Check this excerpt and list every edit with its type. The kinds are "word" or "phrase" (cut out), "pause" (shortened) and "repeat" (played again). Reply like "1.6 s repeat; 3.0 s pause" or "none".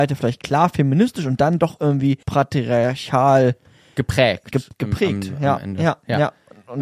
2.2 s pause